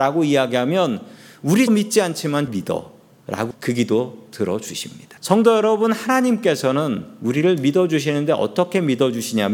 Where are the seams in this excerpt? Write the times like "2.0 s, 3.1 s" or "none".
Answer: 1.7 s, 2.5 s, 3.5 s, 5.2 s